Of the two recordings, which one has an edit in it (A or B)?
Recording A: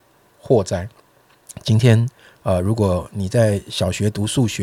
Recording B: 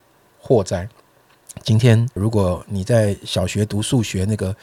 B